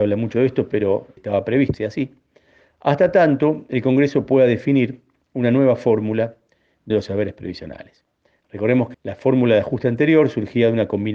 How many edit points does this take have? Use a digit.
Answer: 4